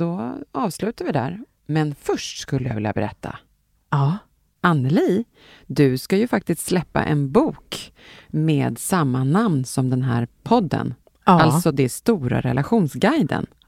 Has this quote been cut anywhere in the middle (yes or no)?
no